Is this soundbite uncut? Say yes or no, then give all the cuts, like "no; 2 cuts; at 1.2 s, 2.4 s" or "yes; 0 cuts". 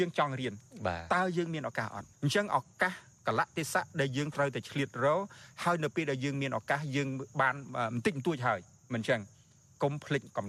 no; 1 cut; at 2.1 s